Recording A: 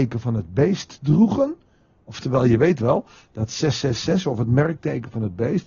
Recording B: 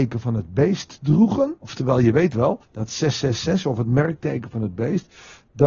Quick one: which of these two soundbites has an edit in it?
B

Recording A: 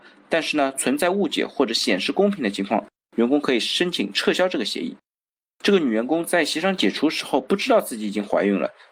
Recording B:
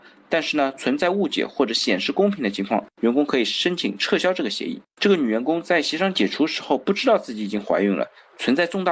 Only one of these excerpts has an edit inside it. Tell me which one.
B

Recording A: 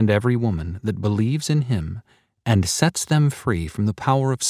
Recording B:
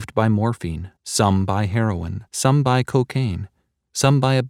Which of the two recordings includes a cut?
B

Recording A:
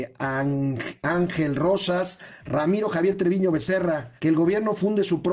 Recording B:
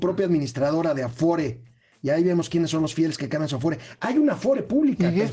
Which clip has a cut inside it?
A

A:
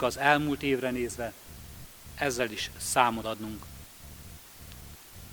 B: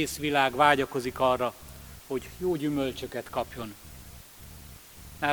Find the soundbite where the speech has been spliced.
A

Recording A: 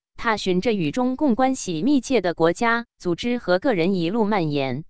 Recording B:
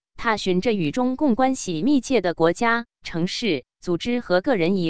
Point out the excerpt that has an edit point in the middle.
A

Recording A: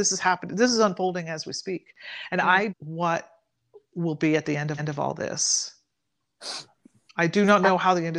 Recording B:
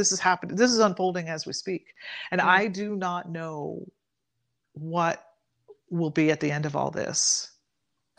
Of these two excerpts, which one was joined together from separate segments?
A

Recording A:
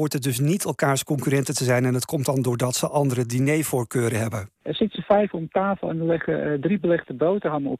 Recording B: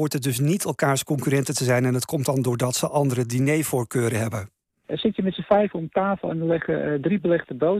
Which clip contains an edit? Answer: A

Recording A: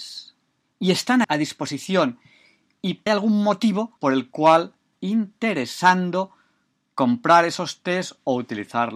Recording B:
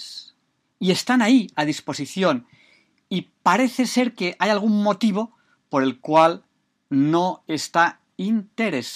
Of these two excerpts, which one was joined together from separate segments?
A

